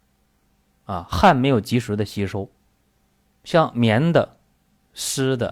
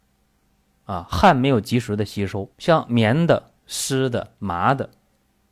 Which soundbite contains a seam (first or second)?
second